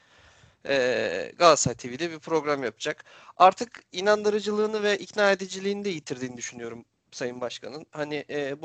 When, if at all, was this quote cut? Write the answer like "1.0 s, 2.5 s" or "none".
none